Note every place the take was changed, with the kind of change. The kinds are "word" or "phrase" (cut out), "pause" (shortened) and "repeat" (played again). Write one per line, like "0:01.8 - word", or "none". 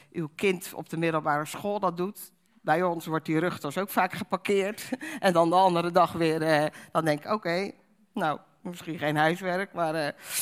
none